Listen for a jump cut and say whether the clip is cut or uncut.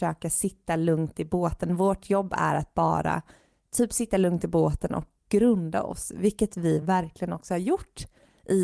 uncut